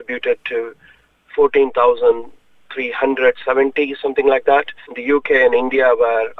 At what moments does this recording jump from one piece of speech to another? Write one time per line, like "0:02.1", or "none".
0:04.9